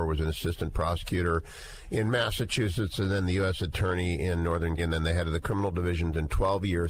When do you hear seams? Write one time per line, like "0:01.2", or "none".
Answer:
0:04.8